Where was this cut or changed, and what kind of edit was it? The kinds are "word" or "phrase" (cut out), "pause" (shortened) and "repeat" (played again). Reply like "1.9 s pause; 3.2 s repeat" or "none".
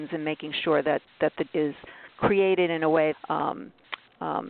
1.5 s phrase; 3.1 s phrase